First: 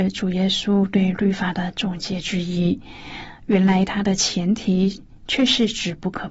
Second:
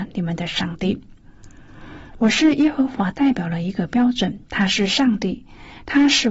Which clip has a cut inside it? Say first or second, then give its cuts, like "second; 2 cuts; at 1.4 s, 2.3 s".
second; 1 cut; at 4.5 s